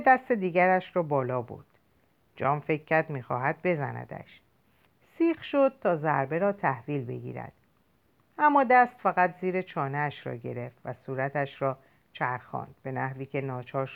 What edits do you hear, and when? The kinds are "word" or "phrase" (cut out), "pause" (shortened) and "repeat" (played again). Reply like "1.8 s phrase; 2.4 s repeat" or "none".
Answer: none